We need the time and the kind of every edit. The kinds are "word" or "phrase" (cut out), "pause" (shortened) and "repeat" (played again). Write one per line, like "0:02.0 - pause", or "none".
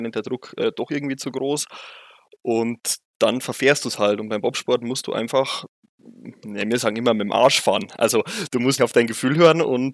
0:08.8 - word